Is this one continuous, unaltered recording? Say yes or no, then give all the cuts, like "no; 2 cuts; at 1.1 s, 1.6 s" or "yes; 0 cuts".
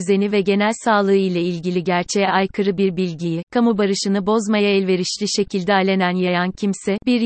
yes; 0 cuts